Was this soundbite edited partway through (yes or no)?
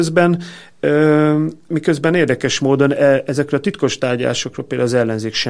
no